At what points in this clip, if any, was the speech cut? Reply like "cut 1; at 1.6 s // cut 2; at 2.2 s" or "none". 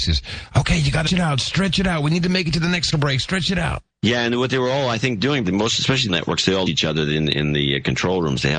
cut 1; at 1.1 s // cut 2; at 2.9 s // cut 3; at 3.9 s // cut 4; at 5.4 s // cut 5; at 6.1 s // cut 6; at 6.7 s